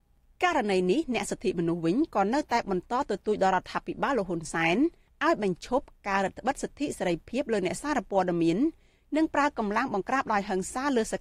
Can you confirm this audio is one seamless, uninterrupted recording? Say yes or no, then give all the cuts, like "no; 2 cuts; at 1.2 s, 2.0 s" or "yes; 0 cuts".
yes; 0 cuts